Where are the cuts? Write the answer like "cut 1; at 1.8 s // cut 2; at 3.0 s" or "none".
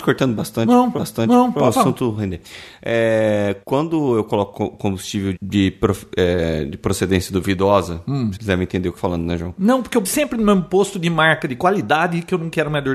cut 1; at 1.0 s // cut 2; at 3.6 s // cut 3; at 5.4 s // cut 4; at 8.4 s // cut 5; at 9.0 s // cut 6; at 10.0 s